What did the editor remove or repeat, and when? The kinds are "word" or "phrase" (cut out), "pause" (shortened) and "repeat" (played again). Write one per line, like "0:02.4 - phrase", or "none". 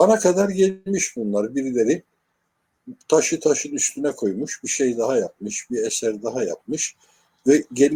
none